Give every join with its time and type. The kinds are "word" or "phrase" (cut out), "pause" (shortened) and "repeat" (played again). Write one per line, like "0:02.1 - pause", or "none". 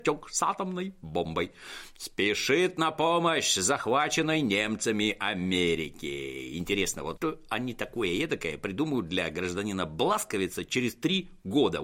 0:07.2 - word